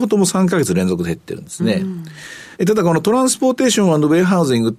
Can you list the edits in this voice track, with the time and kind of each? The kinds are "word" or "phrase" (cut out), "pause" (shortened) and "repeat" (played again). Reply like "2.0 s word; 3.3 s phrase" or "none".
2.5 s pause